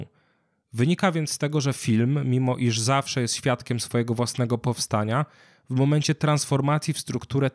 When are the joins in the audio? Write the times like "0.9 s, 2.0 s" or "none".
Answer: none